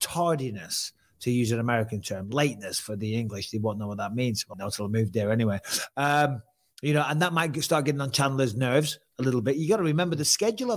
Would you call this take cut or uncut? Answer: cut